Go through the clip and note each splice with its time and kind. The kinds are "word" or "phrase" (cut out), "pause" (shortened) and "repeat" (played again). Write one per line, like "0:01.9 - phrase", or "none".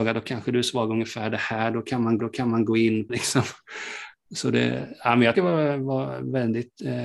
0:02.2 - repeat
0:03.1 - word
0:05.3 - word